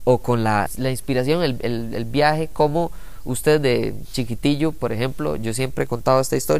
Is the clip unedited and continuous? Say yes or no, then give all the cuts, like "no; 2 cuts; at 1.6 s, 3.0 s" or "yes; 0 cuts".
yes; 0 cuts